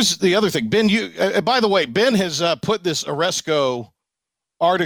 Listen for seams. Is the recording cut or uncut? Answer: uncut